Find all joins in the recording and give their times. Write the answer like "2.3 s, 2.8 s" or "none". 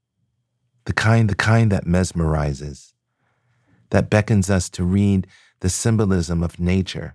1.3 s

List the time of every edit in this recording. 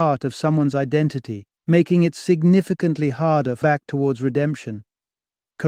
1.5 s, 3.6 s

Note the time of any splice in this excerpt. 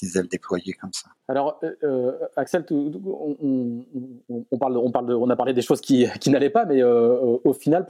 1.2 s

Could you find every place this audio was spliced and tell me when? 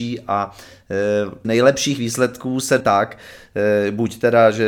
1.4 s, 2.8 s

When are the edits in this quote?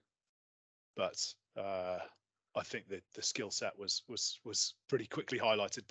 none

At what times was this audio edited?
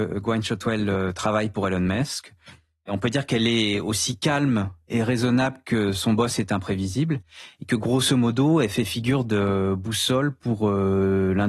none

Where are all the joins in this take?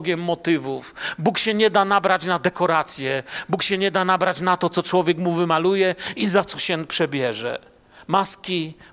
none

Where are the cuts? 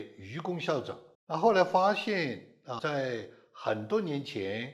1.1 s, 2.8 s

